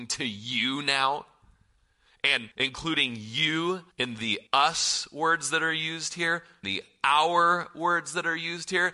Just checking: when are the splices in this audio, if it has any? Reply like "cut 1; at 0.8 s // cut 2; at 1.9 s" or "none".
cut 1; at 2.5 s // cut 2; at 3.9 s // cut 3; at 4.5 s // cut 4; at 6.6 s